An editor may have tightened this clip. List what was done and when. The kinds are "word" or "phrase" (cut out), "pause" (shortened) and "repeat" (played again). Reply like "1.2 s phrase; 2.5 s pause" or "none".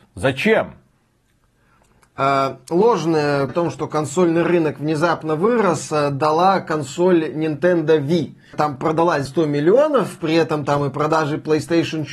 3.5 s word; 8.5 s word; 9.3 s word